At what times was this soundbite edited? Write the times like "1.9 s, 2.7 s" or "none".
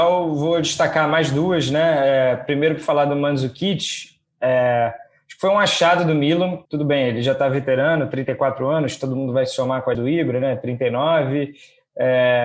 6.6 s, 9.9 s